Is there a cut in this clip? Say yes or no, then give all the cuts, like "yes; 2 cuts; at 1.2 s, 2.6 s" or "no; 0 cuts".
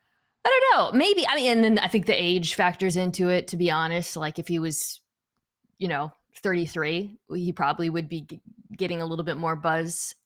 no; 0 cuts